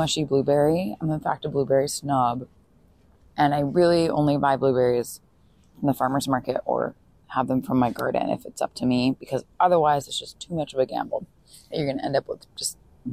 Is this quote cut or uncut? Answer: uncut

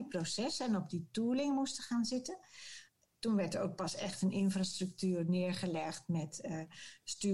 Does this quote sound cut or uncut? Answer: uncut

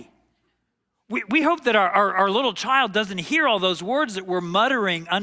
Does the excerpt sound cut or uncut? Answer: uncut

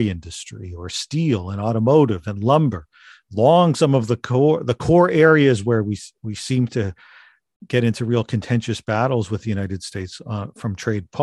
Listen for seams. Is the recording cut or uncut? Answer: uncut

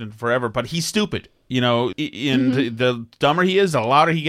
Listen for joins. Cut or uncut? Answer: cut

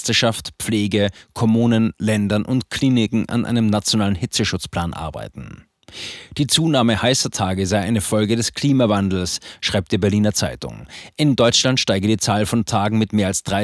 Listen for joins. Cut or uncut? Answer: uncut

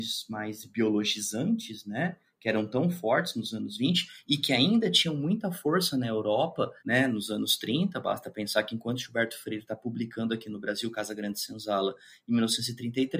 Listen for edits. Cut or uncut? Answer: cut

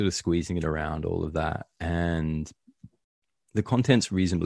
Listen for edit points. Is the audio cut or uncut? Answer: uncut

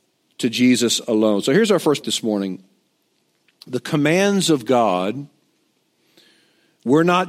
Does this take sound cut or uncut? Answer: cut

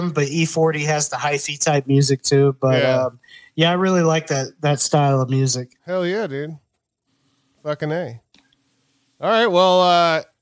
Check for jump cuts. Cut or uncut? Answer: cut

